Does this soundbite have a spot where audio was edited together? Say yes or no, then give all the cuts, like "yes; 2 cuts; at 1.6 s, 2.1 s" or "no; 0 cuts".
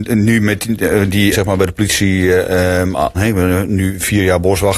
yes; 2 cuts; at 1.3 s, 3.1 s